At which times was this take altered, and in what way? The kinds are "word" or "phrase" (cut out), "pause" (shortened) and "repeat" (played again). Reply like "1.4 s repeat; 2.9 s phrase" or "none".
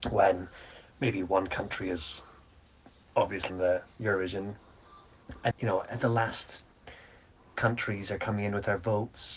3.5 s word; 5.5 s word